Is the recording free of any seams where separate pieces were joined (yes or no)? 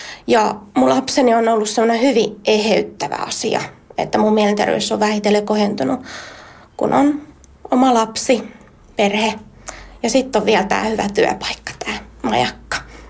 yes